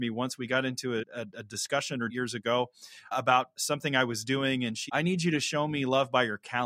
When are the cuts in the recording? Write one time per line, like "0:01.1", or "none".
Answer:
0:01.0
0:02.1
0:03.1
0:03.6
0:04.9